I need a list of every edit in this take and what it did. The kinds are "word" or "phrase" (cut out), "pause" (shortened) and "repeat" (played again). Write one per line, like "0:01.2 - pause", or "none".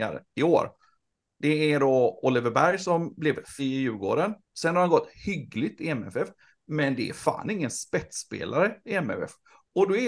0:03.6 - phrase
0:04.4 - pause